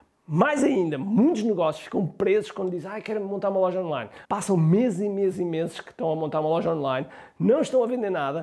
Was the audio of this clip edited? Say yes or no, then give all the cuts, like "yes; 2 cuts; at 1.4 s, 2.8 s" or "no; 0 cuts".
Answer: yes; 1 cut; at 4.2 s